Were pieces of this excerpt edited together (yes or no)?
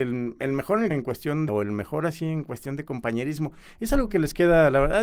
yes